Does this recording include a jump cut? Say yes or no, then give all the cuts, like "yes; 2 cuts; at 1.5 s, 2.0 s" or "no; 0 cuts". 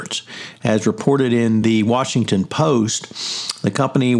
no; 0 cuts